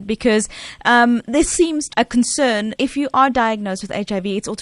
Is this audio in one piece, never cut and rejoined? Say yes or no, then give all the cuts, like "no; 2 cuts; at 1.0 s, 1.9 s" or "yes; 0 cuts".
no; 3 cuts; at 1.4 s, 1.9 s, 2.8 s